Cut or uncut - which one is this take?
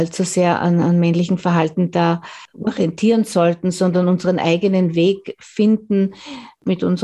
uncut